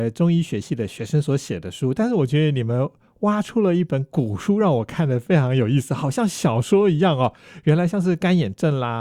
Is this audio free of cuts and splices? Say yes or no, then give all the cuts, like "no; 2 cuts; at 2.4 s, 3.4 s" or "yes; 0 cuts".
yes; 0 cuts